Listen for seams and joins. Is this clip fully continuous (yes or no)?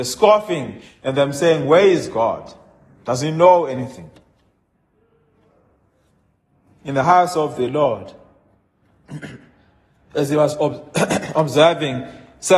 yes